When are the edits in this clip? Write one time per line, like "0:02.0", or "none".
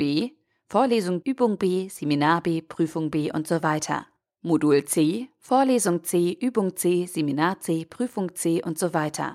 0:01.2